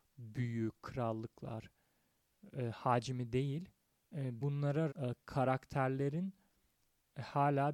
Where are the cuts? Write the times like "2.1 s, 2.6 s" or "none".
4.4 s, 4.9 s